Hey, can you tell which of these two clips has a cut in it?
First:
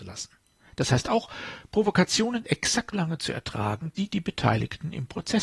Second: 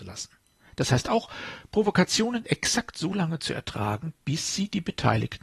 first; 2 cuts; at 2.9 s, 4.0 s

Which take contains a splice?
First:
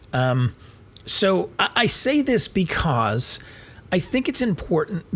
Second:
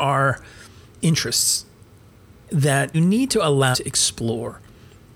second; 3 cuts; at 1.0 s, 2.9 s, 3.7 s

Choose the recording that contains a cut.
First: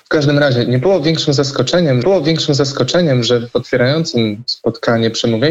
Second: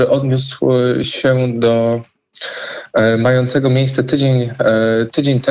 first; 1 cut; at 2.0 s

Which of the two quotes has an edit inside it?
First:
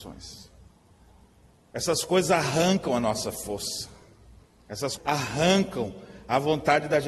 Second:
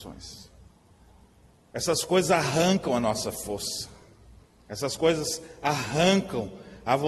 first; 1 cut; at 5.0 s

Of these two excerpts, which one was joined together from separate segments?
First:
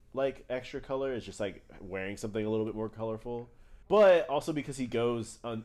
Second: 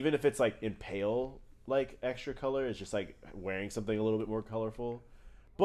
first; 1 cut; at 3.8 s

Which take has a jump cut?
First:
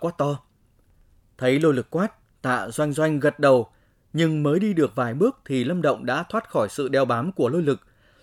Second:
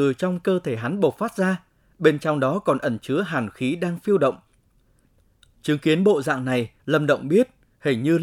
second; 1 cut; at 6.8 s

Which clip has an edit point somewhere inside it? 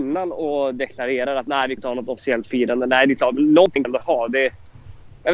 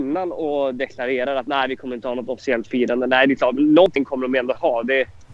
first; 2 cuts; at 1.8 s, 3.8 s

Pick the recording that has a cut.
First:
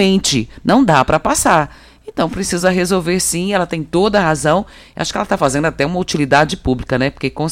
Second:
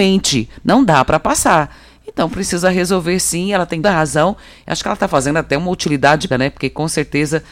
second; 2 cuts; at 3.8 s, 6.3 s

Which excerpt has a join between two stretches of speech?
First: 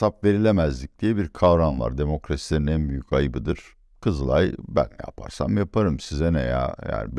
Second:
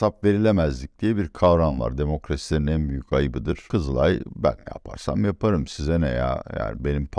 second; 1 cut; at 3.7 s

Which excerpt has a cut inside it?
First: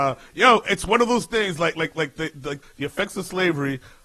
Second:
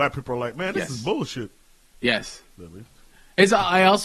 first; 2 cuts; at 1.7 s, 2.6 s

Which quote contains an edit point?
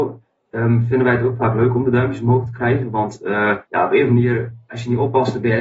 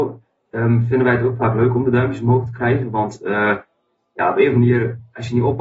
first; 1 cut; at 3.7 s

